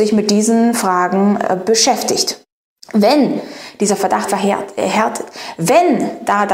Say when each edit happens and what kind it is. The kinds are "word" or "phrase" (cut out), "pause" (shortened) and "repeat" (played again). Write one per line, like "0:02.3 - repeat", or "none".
0:02.5 - pause
0:04.3 - word